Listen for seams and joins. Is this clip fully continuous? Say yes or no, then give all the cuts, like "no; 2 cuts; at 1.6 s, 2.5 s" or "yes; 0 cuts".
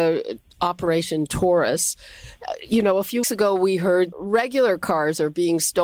no; 2 cuts; at 3.2 s, 4.1 s